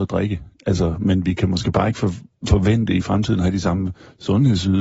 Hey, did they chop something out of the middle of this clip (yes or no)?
no